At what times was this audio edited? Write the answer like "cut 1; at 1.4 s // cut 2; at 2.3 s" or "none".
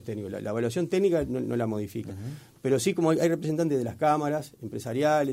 none